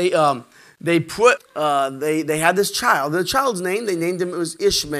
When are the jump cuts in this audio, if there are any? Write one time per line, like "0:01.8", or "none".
0:01.4